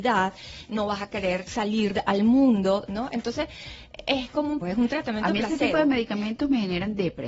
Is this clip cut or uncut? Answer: cut